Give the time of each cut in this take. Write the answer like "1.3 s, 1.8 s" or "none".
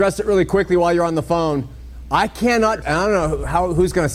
2.8 s